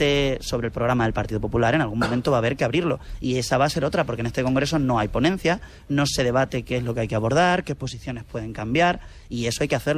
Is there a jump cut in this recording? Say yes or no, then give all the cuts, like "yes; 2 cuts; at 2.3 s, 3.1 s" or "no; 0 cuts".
no; 0 cuts